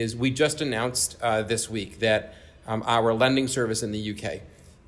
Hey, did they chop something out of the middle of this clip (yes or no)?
no